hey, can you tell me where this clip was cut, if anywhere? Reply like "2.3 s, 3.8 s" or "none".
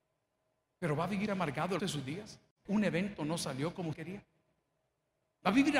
1.3 s, 1.8 s, 2.7 s, 3.9 s